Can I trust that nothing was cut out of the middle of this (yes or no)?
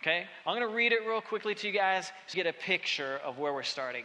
no